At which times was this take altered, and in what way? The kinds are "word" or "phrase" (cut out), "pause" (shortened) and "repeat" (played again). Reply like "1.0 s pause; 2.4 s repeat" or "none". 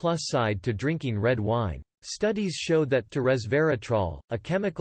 1.9 s pause; 3.1 s word